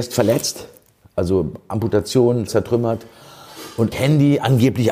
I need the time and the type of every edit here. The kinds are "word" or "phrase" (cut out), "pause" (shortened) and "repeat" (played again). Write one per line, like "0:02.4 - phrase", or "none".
0:02.5 - word
0:03.9 - word